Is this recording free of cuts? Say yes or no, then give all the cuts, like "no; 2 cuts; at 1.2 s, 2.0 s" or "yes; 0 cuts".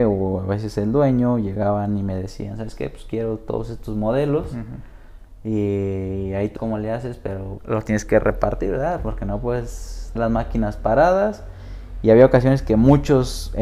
no; 3 cuts; at 6.6 s, 7.6 s, 10.2 s